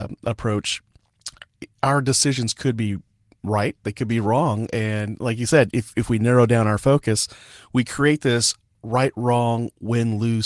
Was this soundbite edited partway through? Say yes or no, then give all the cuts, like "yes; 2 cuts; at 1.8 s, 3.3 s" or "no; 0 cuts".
no; 0 cuts